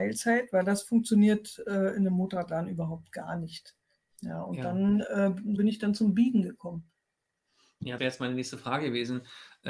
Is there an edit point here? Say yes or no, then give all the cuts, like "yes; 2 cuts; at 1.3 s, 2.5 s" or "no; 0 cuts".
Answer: yes; 2 cuts; at 5.6 s, 8.0 s